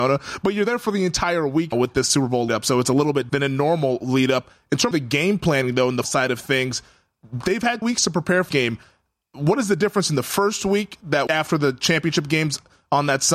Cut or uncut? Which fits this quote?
cut